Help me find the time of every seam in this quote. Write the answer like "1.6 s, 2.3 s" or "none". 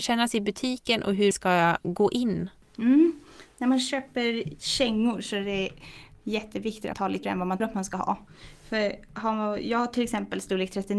1.3 s, 4.6 s, 6.9 s, 7.2 s, 7.6 s